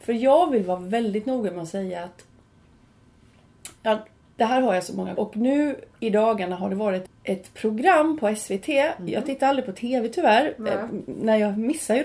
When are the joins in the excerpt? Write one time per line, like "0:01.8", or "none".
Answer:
0:03.8
0:05.2
0:07.1